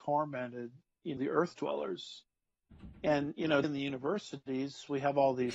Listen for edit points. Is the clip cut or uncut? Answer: cut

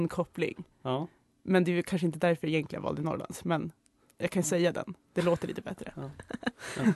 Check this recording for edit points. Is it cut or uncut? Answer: uncut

